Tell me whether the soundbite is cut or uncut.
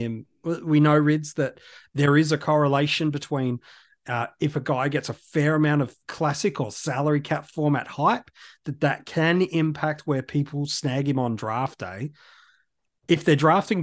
uncut